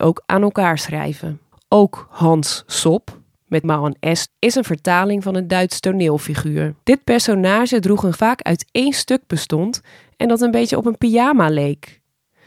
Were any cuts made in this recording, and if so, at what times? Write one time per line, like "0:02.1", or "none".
0:01.5
0:03.6
0:04.3
0:06.8
0:08.1